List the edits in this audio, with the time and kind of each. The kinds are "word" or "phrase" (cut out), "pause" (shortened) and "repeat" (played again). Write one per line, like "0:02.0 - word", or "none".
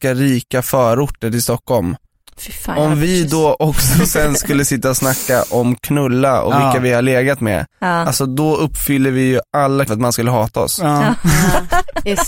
0:07.7 - pause
0:09.9 - word